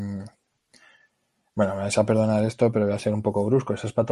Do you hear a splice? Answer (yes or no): no